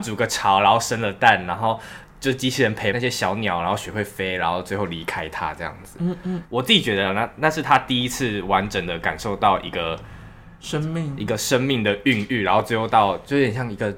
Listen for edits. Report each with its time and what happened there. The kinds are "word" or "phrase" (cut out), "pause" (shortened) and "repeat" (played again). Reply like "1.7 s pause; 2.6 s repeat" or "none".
none